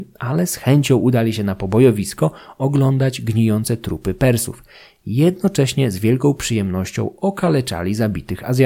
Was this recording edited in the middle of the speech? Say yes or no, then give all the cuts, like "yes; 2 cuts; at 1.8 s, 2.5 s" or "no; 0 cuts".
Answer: no; 0 cuts